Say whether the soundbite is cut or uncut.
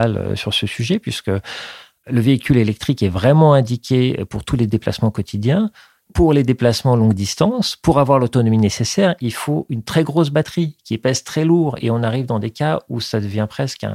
uncut